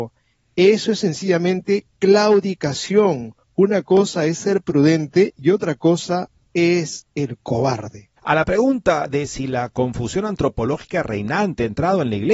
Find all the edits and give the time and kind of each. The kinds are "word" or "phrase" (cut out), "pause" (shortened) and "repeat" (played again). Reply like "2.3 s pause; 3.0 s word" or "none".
3.4 s pause; 7.1 s pause; 8.2 s pause